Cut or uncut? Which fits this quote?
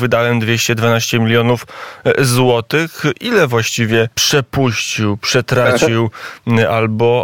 cut